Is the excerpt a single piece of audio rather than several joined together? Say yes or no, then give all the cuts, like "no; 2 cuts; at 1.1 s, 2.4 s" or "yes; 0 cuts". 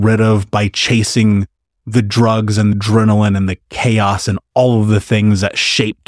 no; 1 cut; at 2.7 s